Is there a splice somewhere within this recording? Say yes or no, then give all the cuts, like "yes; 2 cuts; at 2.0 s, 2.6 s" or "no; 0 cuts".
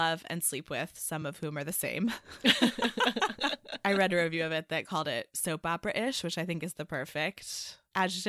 no; 0 cuts